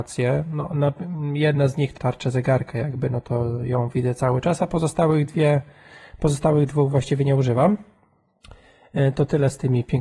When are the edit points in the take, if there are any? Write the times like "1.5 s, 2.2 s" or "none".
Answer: 2.0 s